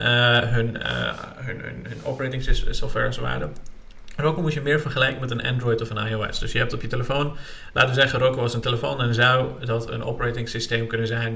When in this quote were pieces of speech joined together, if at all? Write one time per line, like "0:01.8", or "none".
none